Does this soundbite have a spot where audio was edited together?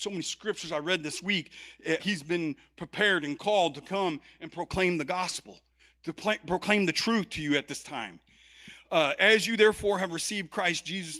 yes; 1 cut; at 2.0 s

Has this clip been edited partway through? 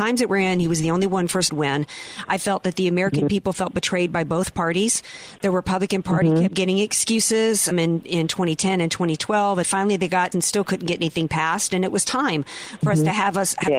yes; 4 cuts; at 1.5 s, 7.7 s, 9.6 s, 10.3 s

